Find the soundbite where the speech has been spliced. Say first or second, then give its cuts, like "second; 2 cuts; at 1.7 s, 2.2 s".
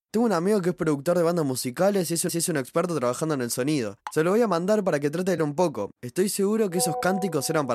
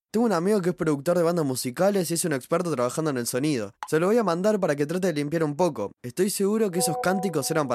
first; 2 cuts; at 2.3 s, 5.4 s